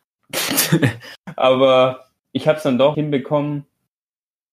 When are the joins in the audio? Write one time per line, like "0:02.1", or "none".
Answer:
0:02.2
0:02.9